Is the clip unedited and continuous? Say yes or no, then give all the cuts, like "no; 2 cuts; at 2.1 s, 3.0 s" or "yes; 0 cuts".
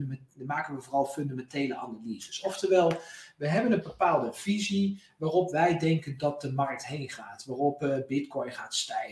yes; 0 cuts